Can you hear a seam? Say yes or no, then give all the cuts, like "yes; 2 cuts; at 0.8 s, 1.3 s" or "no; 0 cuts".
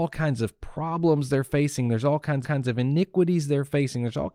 yes; 1 cut; at 2.4 s